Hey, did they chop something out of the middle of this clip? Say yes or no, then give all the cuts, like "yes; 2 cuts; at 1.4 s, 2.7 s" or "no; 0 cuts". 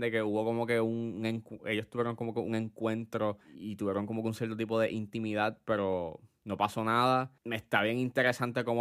yes; 1 cut; at 7.4 s